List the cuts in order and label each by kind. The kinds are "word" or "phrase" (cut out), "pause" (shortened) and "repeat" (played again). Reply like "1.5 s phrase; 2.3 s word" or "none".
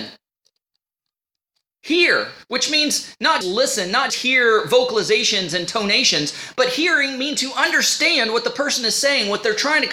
3.4 s word; 4.1 s word